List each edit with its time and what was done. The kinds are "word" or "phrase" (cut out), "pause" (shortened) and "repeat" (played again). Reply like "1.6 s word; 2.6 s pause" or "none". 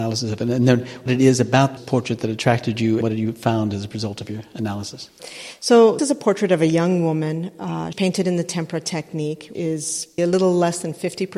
1.8 s word; 3.0 s word; 6.0 s word; 7.9 s word; 9.5 s word; 10.2 s word